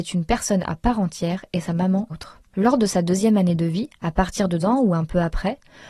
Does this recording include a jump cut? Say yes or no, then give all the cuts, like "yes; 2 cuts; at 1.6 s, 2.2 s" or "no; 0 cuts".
yes; 3 cuts; at 2.1 s, 2.5 s, 4.6 s